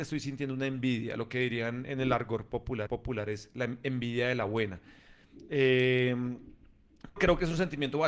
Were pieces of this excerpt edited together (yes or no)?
yes